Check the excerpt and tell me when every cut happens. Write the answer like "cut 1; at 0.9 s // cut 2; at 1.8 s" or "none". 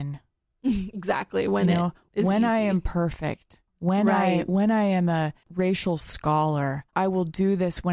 cut 1; at 3.7 s // cut 2; at 5.4 s // cut 3; at 6.9 s